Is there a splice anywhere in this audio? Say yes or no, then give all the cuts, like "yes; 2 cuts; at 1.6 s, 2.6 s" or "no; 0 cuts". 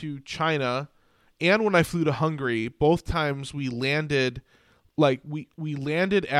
no; 0 cuts